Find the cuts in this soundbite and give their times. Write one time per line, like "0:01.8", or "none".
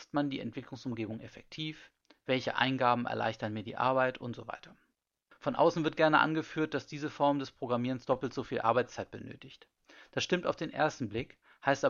none

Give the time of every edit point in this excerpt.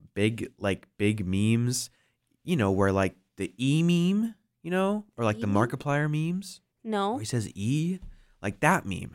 0:06.7

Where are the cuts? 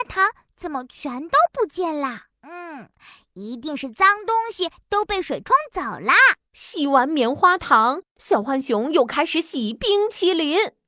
0:02.3
0:06.4

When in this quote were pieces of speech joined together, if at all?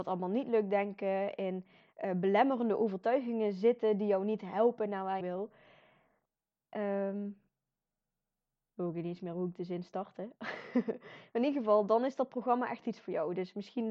0:05.2

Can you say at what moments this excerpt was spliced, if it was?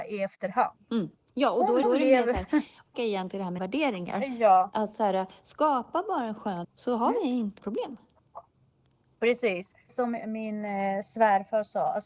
0:01.1
0:01.8
0:02.9
0:03.6
0:06.6
0:07.6
0:09.9
0:10.2

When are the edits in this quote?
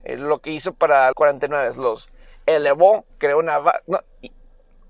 0:01.1
0:03.1

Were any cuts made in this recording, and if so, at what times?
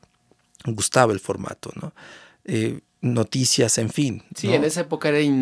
none

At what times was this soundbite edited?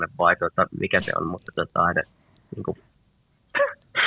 none

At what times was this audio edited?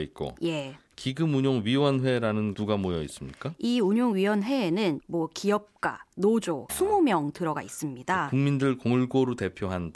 0:02.5
0:05.0
0:06.7

